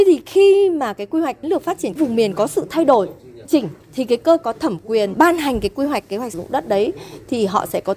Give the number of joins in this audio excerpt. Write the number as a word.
seven